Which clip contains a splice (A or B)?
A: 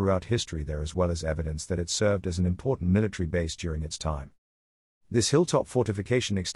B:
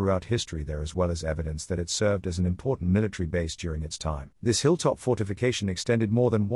B